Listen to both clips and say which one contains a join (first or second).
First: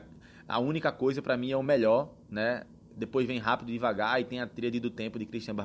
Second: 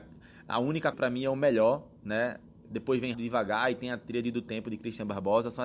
second